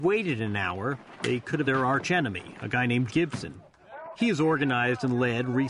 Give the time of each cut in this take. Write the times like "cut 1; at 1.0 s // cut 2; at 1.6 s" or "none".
cut 1; at 1.6 s // cut 2; at 3.1 s